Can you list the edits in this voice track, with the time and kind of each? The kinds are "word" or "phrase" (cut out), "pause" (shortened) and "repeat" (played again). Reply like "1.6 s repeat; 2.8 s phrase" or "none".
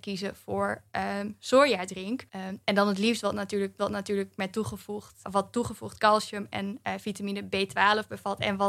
2.3 s pause; 3.8 s repeat; 5.2 s word